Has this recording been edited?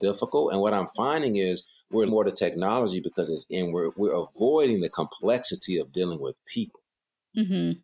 yes; 2 cuts; at 2.1 s, 3.5 s

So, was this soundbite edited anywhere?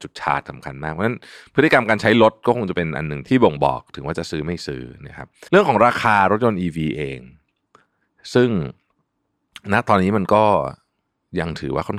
yes; 1 cut; at 5.5 s

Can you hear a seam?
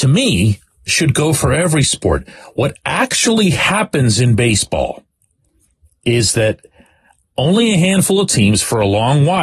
no; 0 cuts

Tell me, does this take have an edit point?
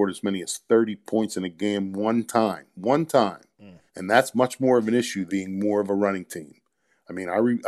yes; 2 cuts; at 3.9 s, 5.3 s

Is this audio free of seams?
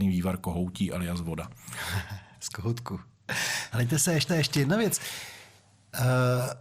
no; 1 cut; at 4.3 s

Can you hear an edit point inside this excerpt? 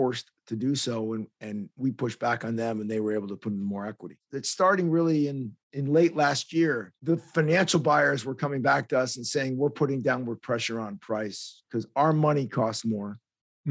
yes; 2 cuts; at 5.6 s, 7.0 s

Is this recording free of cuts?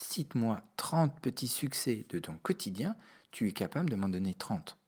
yes; 0 cuts

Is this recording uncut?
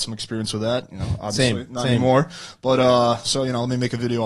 yes; 0 cuts

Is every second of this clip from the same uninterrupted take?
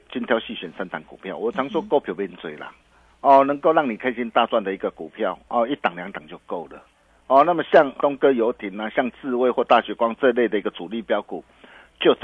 no; 1 cut; at 8.0 s

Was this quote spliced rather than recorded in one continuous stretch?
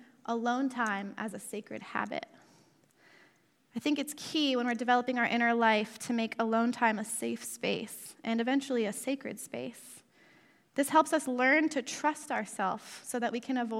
no; 0 cuts

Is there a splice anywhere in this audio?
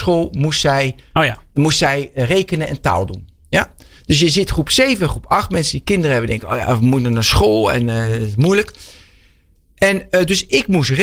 no; 0 cuts

